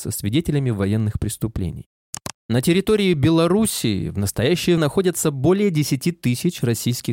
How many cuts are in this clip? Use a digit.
2